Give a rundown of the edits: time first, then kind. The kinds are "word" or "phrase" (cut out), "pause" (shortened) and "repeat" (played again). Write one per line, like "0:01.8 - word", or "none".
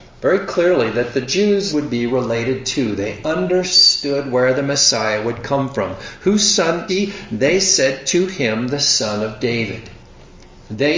0:01.7 - phrase
0:06.9 - word

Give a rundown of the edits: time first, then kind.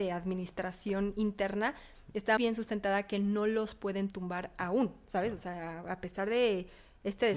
0:02.4 - word

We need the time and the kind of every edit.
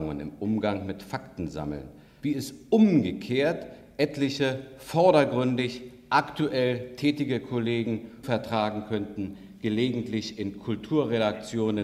0:02.2 - word
0:08.2 - word

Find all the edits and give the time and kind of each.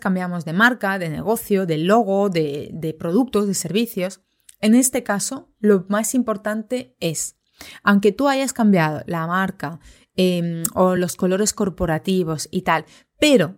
none

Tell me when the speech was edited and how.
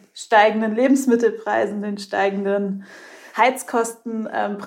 none

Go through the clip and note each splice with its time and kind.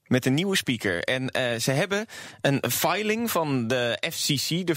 none

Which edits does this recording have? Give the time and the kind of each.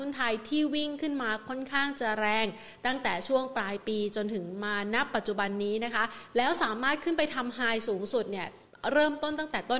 none

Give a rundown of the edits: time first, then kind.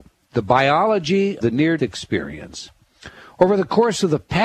0:01.4 - word
0:01.8 - word

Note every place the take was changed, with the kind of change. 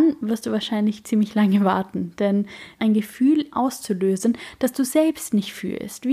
0:02.8 - phrase
0:03.5 - phrase

